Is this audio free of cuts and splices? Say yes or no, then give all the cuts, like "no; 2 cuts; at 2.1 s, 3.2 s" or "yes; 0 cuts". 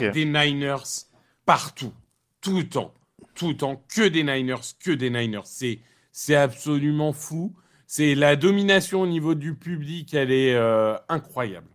yes; 0 cuts